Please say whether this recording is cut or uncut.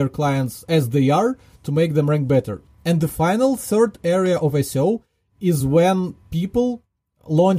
uncut